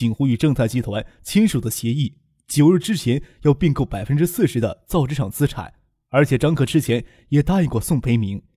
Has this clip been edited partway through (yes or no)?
no